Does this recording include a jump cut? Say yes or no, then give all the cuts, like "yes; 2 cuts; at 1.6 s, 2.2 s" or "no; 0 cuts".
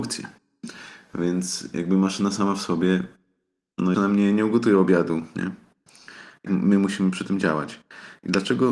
yes; 2 cuts; at 3.9 s, 6.5 s